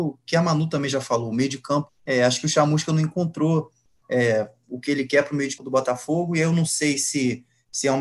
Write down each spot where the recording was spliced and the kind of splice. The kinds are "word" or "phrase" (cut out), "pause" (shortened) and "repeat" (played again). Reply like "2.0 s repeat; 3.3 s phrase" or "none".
1.9 s word; 5.6 s word